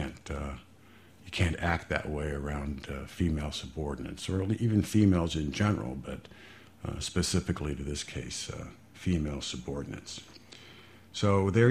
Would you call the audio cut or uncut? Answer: uncut